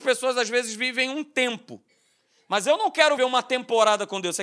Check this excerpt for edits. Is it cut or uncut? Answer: cut